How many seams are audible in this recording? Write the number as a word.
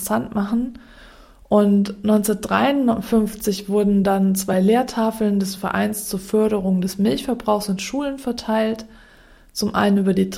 zero